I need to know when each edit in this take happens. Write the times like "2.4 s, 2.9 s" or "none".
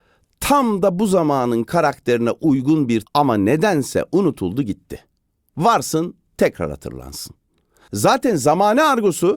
3.0 s